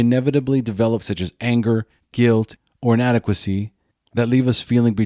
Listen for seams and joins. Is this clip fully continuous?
no; 2 cuts; at 1.0 s, 2.0 s

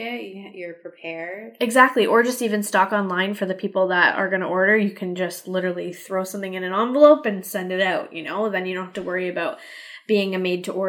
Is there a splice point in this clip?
no; 0 cuts

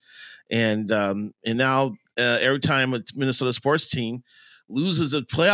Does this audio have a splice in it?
no; 0 cuts

